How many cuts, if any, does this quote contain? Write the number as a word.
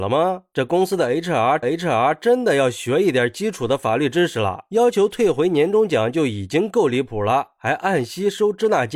one